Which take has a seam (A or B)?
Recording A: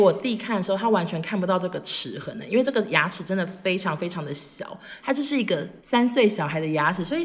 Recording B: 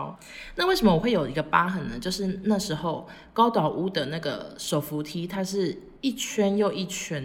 B